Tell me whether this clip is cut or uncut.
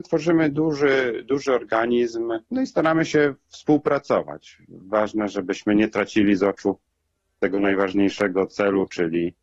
cut